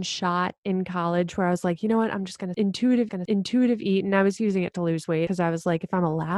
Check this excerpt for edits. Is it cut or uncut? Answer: cut